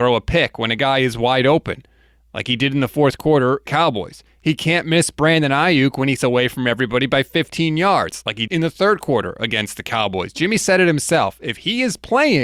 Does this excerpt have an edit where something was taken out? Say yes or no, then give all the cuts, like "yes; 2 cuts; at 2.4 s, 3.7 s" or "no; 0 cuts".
yes; 3 cuts; at 3.7 s, 6.2 s, 8.5 s